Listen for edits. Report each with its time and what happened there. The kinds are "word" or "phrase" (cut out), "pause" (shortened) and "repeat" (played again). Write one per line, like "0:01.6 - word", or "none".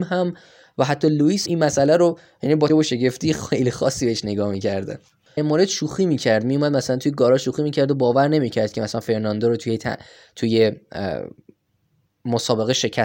0:01.5 - word
0:02.7 - word
0:05.4 - phrase